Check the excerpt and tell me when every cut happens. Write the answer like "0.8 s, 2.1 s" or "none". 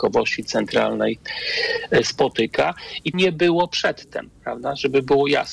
3.1 s